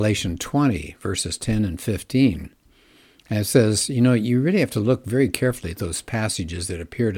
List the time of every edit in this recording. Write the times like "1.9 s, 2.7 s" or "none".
none